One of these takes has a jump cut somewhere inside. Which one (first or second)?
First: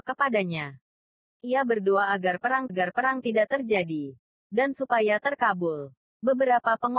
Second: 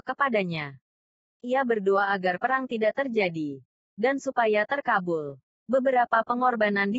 first